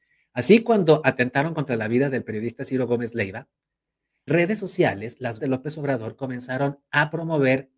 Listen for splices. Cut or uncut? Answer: cut